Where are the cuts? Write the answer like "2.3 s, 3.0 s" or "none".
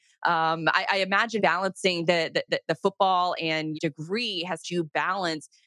1.4 s, 2.5 s, 3.4 s, 3.7 s, 4.6 s